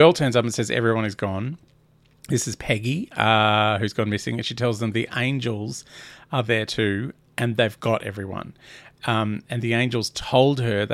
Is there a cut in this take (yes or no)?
no